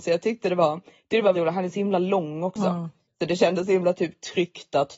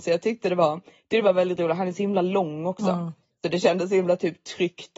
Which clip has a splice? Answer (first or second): first